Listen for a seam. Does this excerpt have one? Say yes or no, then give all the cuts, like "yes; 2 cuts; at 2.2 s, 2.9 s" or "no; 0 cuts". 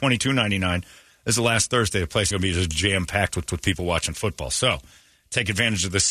yes; 2 cuts; at 2.3 s, 3.5 s